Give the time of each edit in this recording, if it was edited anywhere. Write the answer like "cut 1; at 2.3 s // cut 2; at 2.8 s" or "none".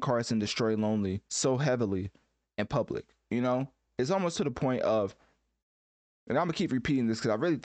cut 1; at 1.3 s